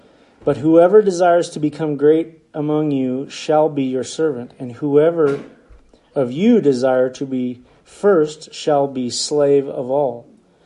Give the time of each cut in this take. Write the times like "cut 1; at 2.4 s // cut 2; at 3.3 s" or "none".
none